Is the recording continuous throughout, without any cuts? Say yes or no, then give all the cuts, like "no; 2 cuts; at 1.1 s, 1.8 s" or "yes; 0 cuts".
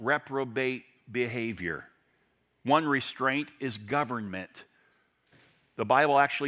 yes; 0 cuts